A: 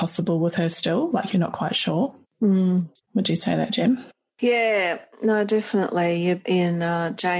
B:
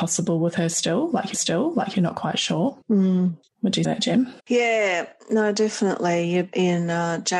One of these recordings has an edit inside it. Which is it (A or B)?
B